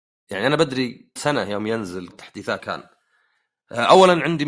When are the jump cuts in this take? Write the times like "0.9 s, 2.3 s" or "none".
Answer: 1.2 s, 2.1 s, 2.6 s